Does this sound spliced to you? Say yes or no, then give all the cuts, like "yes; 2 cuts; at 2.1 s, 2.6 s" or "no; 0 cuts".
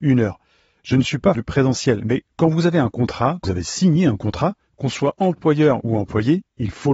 yes; 2 cuts; at 1.3 s, 3.4 s